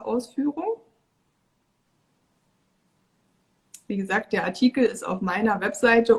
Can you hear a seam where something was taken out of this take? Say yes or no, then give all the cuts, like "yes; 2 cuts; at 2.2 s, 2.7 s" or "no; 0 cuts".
no; 0 cuts